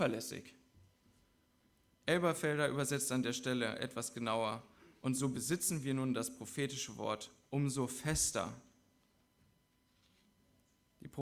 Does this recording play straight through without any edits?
yes; 0 cuts

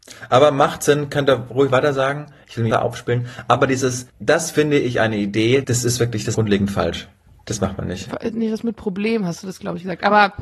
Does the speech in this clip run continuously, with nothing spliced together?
no; 5 cuts; at 2.7 s, 4.1 s, 5.6 s, 6.3 s, 7.3 s

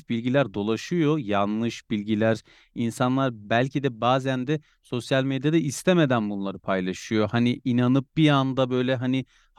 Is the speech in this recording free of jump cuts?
yes; 0 cuts

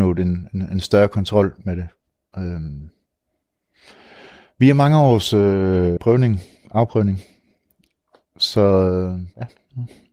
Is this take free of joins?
no; 1 cut; at 6.0 s

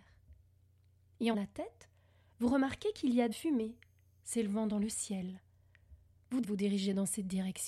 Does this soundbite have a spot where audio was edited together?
yes; 3 cuts; at 1.3 s, 3.3 s, 6.4 s

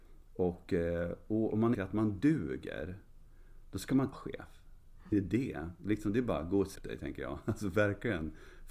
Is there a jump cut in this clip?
yes; 4 cuts; at 1.7 s, 4.1 s, 5.1 s, 6.8 s

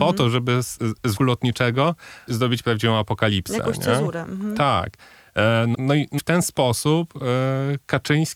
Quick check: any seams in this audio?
yes; 4 cuts; at 1.2 s, 2.3 s, 5.7 s, 6.2 s

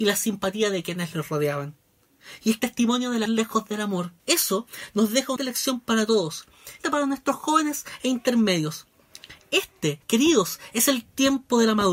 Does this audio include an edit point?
yes; 6 cuts; at 2.6 s, 3.3 s, 4.2 s, 5.4 s, 6.8 s, 10.0 s

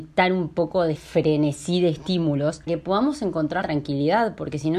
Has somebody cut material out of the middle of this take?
yes; 3 cuts; at 1.0 s, 2.7 s, 3.6 s

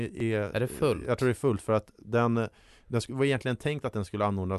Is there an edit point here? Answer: no; 0 cuts

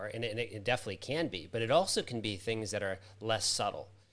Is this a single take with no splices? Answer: yes; 0 cuts

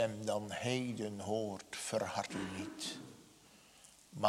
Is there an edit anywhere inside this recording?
no; 0 cuts

